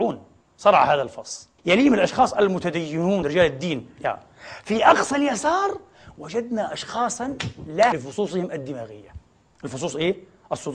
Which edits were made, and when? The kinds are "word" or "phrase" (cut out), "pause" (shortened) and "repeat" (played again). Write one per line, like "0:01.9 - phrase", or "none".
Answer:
0:01.6 - pause
0:03.2 - word
0:07.9 - word